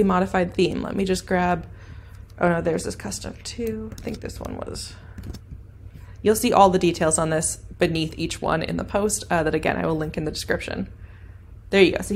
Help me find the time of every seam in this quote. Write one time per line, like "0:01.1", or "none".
none